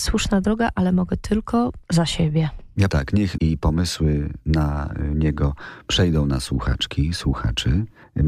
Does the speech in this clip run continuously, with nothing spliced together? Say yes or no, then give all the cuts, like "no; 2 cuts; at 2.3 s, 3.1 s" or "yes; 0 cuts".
no; 3 cuts; at 1.8 s, 2.9 s, 3.4 s